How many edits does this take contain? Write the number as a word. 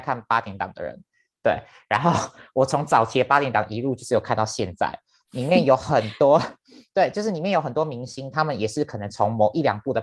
zero